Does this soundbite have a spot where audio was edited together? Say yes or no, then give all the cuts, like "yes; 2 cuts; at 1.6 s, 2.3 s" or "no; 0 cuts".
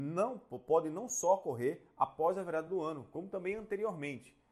no; 0 cuts